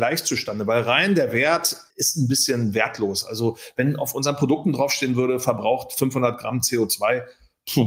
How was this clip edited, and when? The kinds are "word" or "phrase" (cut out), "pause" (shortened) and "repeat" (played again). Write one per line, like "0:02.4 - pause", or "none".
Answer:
0:01.9 - pause